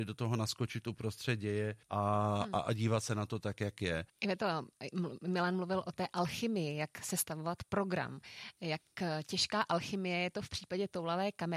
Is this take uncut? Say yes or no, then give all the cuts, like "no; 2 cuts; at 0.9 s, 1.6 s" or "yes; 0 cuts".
no; 1 cut; at 1.8 s